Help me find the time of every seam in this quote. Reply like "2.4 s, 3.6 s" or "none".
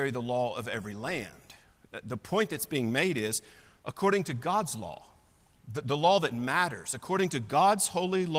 none